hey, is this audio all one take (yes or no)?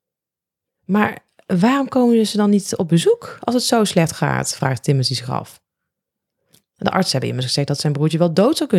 yes